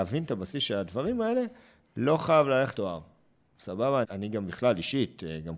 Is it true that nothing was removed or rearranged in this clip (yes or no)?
no